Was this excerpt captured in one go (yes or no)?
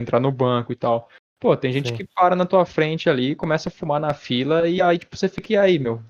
yes